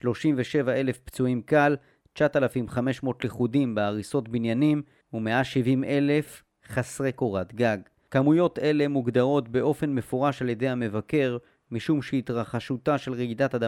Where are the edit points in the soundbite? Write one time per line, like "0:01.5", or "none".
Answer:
none